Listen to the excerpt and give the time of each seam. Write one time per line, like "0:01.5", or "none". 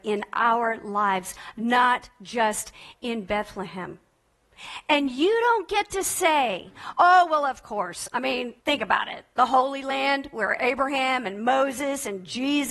0:08.6